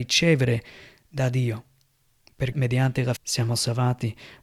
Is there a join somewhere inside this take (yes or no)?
yes